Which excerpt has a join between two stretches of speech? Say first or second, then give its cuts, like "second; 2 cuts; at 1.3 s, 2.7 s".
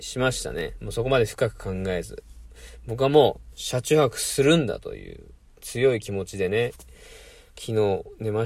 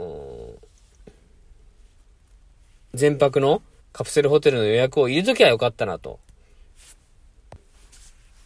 second; 1 cut; at 3.8 s